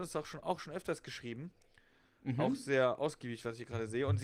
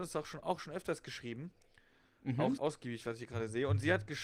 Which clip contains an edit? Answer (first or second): second